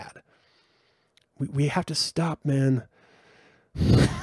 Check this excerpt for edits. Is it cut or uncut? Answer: uncut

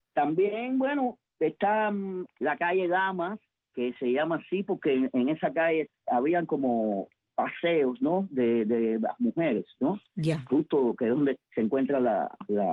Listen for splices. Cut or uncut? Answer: uncut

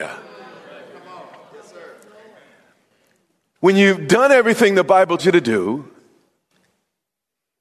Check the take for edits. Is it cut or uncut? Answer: cut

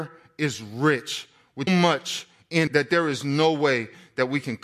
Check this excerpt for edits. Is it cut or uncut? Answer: cut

